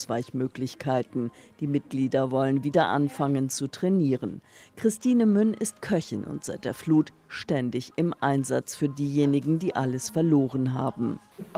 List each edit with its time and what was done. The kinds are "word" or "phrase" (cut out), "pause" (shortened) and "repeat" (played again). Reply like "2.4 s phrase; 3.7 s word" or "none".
none